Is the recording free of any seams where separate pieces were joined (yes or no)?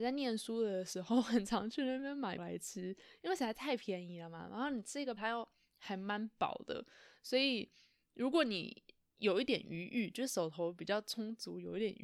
no